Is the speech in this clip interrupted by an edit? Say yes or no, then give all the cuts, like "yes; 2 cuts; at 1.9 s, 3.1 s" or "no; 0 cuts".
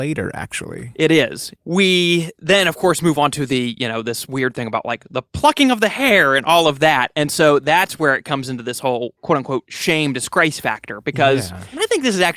no; 0 cuts